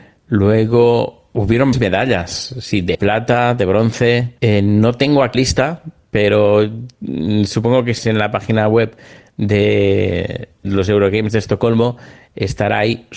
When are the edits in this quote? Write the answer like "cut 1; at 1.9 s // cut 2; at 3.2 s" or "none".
cut 1; at 1.7 s // cut 2; at 2.9 s // cut 3; at 4.4 s // cut 4; at 5.3 s // cut 5; at 8.0 s // cut 6; at 10.6 s